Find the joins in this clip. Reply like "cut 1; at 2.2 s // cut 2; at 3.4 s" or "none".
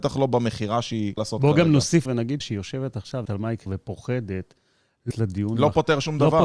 cut 1; at 1.2 s // cut 2; at 2.1 s // cut 3; at 2.4 s // cut 4; at 3.3 s // cut 5; at 3.7 s // cut 6; at 5.1 s